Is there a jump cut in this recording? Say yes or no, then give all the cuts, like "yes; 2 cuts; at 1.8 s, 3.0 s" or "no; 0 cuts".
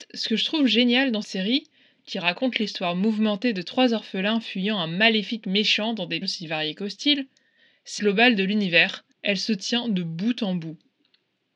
yes; 4 cuts; at 1.2 s, 6.2 s, 8.0 s, 9.1 s